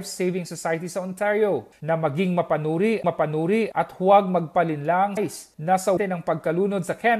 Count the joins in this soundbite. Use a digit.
3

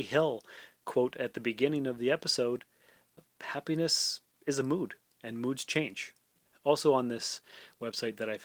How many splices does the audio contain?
0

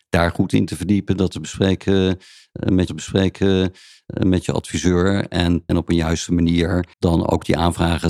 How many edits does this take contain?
3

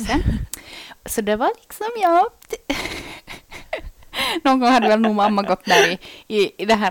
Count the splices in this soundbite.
0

